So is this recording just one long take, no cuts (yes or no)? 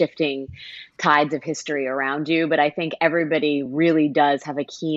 yes